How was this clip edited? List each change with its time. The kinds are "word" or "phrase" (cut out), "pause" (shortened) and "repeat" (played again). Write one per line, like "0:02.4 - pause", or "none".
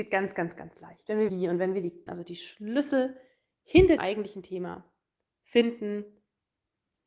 0:01.3 - word
0:02.1 - word
0:04.0 - word